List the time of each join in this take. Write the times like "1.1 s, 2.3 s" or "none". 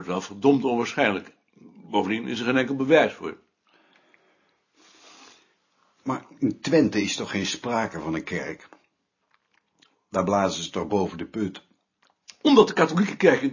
none